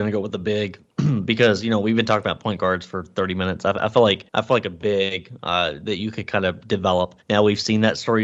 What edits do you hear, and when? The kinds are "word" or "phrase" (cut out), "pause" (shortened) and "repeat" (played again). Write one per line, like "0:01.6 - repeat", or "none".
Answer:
0:04.3 - pause
0:07.2 - pause